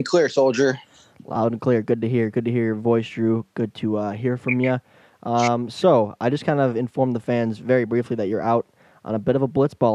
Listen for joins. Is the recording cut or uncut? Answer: uncut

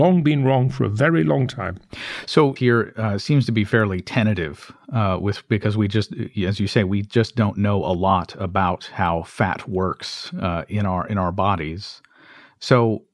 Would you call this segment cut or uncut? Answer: cut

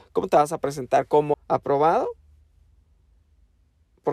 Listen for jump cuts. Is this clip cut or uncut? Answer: cut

